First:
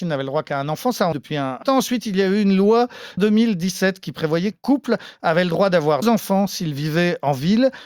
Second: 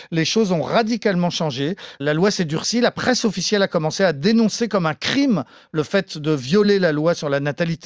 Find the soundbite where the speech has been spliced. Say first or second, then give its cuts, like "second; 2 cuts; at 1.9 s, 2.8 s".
first; 5 cuts; at 1.1 s, 1.6 s, 3.2 s, 4.5 s, 6.0 s